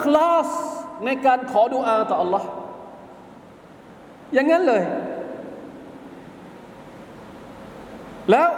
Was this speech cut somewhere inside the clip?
no; 0 cuts

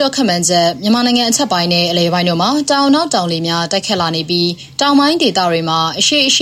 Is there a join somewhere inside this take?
no; 0 cuts

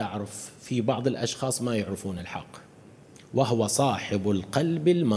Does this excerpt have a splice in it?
no; 0 cuts

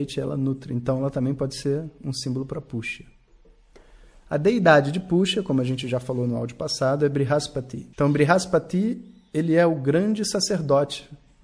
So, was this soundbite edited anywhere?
yes; 1 cut; at 7.9 s

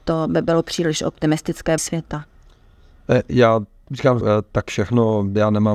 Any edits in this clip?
yes; 3 cuts; at 1.8 s, 4.2 s, 4.7 s

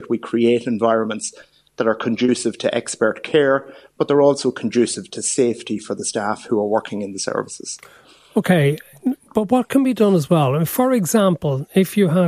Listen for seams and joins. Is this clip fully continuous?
yes; 0 cuts

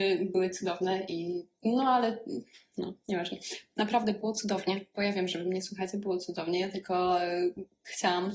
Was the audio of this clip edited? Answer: no; 0 cuts

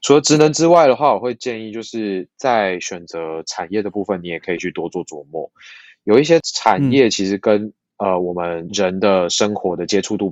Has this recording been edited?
no; 0 cuts

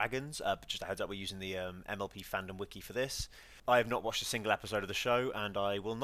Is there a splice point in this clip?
no; 0 cuts

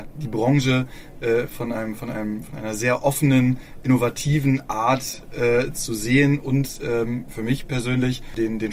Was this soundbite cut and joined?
no; 0 cuts

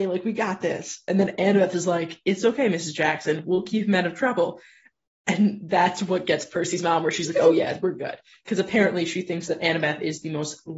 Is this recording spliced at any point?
no; 0 cuts

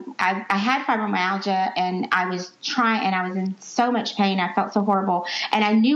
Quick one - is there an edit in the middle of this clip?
no; 0 cuts

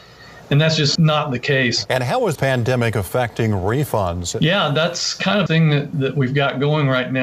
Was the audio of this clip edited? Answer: yes; 4 cuts; at 1.0 s, 2.4 s, 5.5 s, 5.9 s

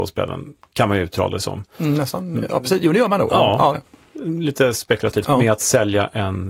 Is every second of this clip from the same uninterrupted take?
no; 2 cuts; at 3.7 s, 5.2 s

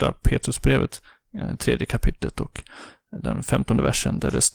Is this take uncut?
yes; 0 cuts

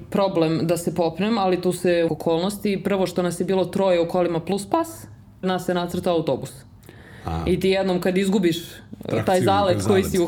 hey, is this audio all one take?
no; 2 cuts; at 2.1 s, 5.4 s

